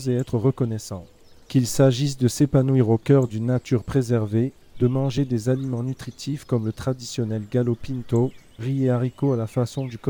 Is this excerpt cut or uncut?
uncut